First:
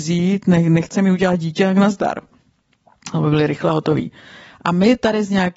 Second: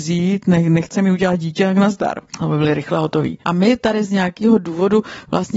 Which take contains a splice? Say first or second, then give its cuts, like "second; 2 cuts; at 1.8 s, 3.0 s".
second; 2 cuts; at 2.3 s, 3.4 s